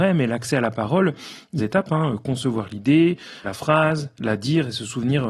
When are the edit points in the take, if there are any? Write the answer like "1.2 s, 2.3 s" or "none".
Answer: 1.6 s, 3.4 s